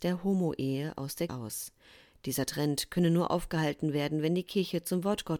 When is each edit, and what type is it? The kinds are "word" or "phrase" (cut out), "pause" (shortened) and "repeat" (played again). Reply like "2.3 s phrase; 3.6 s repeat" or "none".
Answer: 1.3 s word